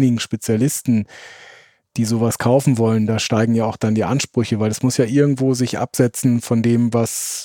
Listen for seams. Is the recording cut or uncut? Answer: uncut